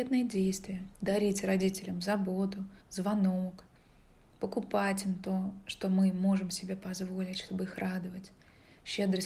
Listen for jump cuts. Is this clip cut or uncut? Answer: cut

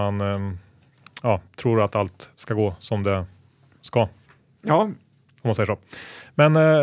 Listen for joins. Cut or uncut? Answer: uncut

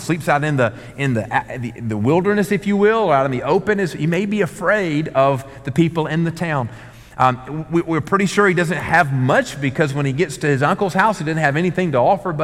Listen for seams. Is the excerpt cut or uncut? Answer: uncut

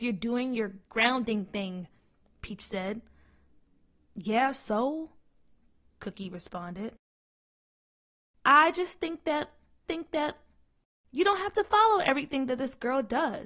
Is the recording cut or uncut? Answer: cut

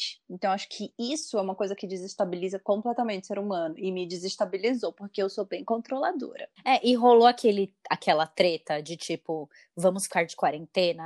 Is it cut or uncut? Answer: uncut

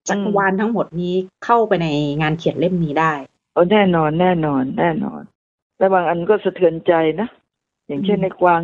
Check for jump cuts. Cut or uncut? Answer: uncut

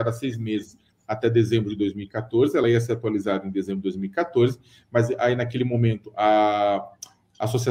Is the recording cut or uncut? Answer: uncut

